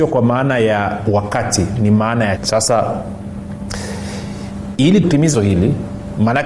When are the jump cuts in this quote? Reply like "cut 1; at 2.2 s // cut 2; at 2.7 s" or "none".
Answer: cut 1; at 2.4 s // cut 2; at 5.0 s // cut 3; at 5.3 s